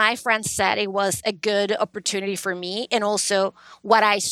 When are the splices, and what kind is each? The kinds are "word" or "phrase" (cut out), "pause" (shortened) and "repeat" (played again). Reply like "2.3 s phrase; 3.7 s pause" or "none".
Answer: none

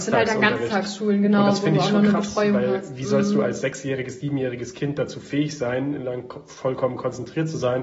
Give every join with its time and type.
6.0 s phrase

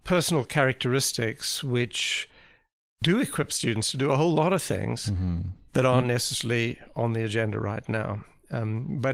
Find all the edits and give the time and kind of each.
none

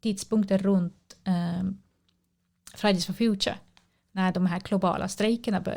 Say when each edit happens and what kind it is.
none

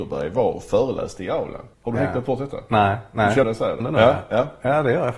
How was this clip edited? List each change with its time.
1.7 s pause; 3.4 s phrase; 3.8 s phrase

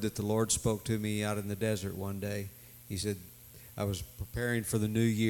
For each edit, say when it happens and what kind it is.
none

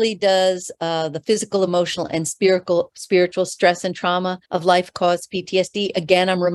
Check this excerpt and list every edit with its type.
4.4 s pause

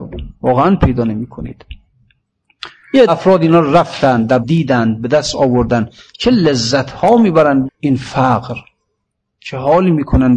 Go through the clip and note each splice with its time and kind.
3.1 s word; 4.4 s word; 7.7 s word

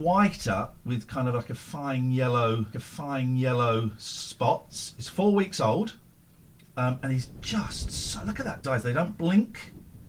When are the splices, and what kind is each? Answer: 2.7 s repeat; 6.3 s pause; 8.6 s phrase

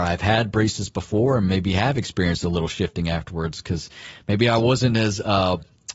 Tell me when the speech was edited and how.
none

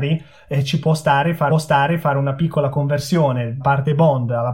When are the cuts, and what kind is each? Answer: 1.5 s repeat; 3.6 s word

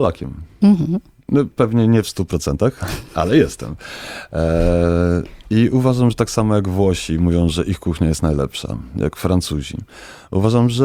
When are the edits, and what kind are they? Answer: 1.2 s pause

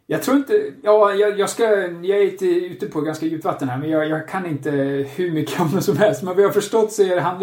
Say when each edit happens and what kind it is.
none

